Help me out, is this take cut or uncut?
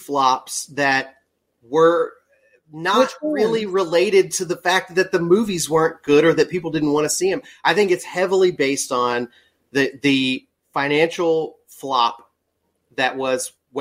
uncut